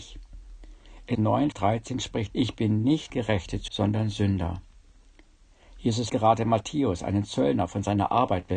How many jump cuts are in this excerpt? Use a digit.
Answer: 6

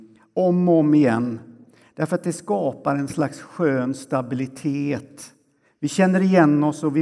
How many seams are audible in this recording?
0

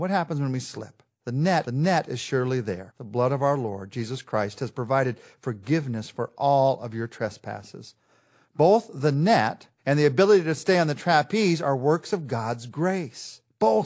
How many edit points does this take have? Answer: 3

